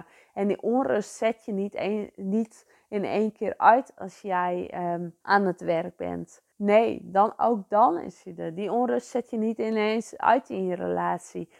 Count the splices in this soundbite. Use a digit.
2